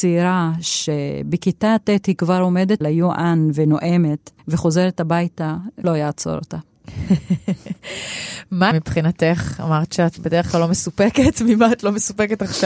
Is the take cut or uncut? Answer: cut